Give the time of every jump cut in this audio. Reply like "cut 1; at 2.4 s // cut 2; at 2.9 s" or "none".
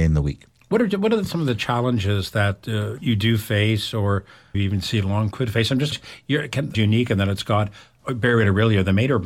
cut 1; at 4.5 s // cut 2; at 5.3 s // cut 3; at 5.9 s // cut 4; at 6.7 s

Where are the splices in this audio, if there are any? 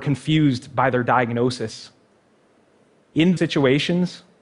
cut 1; at 3.4 s

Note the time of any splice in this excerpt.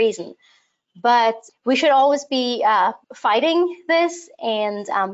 cut 1; at 1.5 s // cut 2; at 3.0 s

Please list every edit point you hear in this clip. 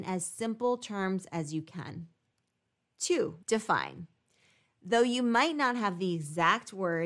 cut 1; at 3.4 s

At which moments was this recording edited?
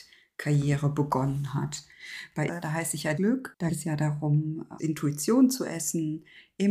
cut 1; at 2.5 s // cut 2; at 3.1 s // cut 3; at 3.7 s // cut 4; at 4.8 s

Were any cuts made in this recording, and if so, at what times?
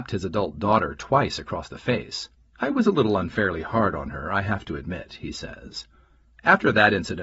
cut 1; at 2.3 s

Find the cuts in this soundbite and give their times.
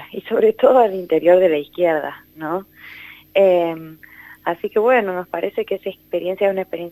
none

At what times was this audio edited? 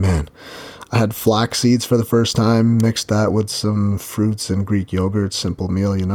none

